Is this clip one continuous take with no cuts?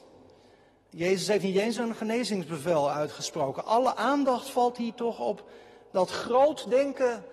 yes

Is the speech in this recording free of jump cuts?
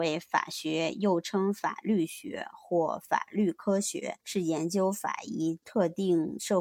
no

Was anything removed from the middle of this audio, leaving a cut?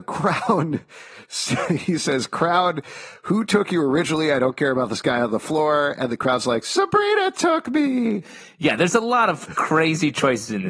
no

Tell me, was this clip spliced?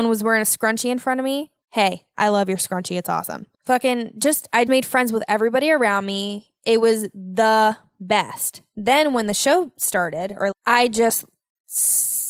yes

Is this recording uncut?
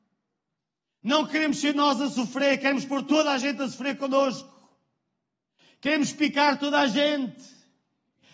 yes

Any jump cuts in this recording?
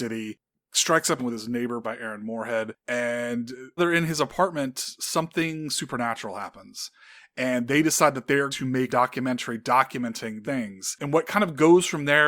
yes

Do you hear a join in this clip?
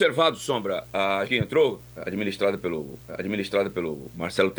yes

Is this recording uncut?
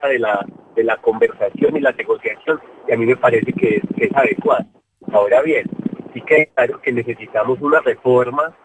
yes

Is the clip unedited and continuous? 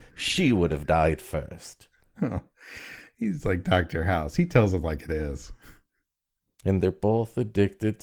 yes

